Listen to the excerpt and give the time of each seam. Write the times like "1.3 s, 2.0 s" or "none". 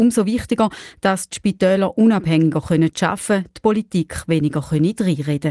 none